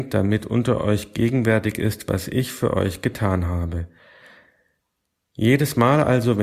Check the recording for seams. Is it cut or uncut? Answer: uncut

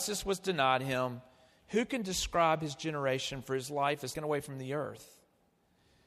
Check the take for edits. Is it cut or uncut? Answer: cut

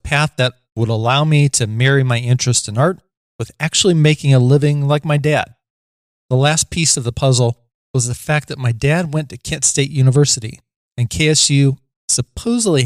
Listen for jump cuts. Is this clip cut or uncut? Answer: uncut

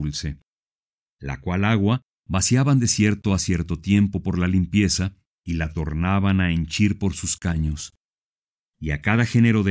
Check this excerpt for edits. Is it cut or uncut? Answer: uncut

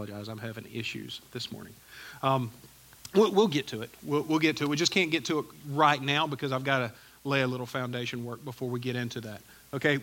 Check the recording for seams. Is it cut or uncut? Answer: uncut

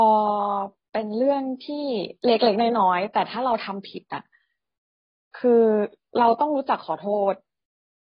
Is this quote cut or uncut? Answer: uncut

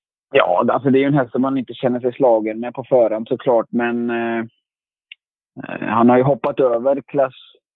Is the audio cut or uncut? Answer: uncut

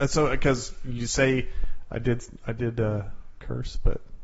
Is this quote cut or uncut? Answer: uncut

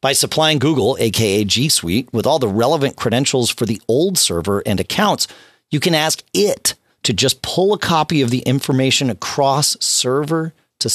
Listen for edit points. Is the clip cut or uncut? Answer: uncut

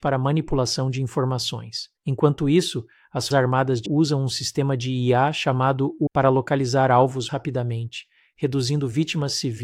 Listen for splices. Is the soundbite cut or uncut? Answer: cut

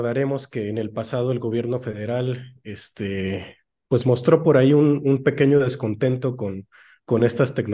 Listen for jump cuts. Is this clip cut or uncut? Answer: uncut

